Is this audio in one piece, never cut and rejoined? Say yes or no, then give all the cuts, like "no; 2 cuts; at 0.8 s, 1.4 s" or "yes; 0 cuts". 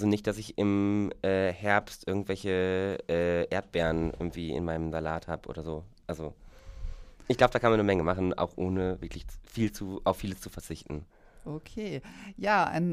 yes; 0 cuts